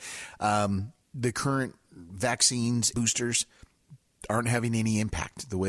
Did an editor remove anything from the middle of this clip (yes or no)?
yes